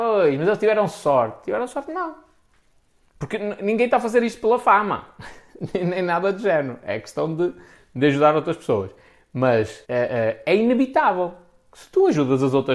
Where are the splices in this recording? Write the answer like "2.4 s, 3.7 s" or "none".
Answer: 9.8 s